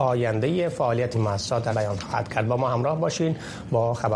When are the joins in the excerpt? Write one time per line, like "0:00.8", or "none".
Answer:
0:01.1
0:01.7